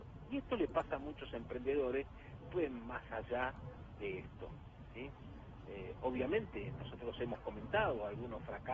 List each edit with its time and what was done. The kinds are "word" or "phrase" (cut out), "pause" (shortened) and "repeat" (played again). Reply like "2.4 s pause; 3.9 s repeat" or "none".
2.5 s word